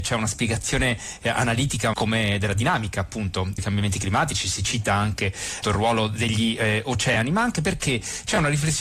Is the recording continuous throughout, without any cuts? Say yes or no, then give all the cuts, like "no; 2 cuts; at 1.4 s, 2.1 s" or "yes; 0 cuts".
no; 3 cuts; at 1.9 s, 3.6 s, 5.6 s